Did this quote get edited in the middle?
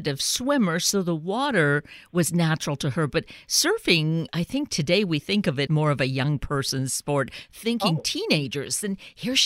yes; 1 cut; at 5.7 s

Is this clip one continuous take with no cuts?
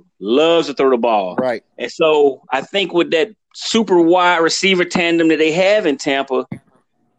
no; 1 cut; at 1.7 s

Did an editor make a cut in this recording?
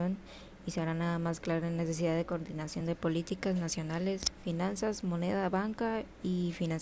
no; 0 cuts

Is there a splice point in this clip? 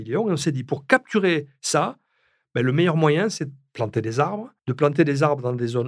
yes; 1 cut; at 4.6 s

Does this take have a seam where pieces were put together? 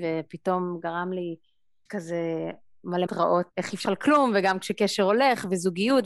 yes; 4 cuts; at 1.9 s, 3.1 s, 3.5 s, 3.8 s

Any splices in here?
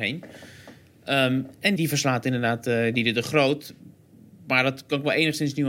yes; 1 cut; at 1.8 s

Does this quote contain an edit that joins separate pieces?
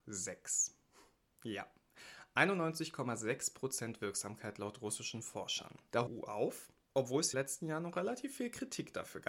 yes; 2 cuts; at 6.1 s, 7.3 s

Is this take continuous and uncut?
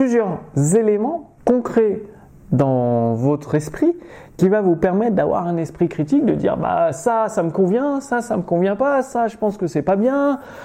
no; 1 cut; at 1.4 s

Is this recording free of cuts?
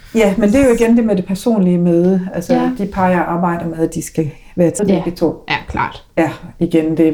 no; 1 cut; at 4.8 s

